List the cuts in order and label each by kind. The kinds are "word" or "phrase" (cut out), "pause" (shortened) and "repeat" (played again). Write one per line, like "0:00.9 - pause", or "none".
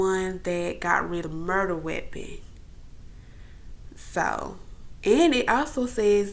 0:01.2 - word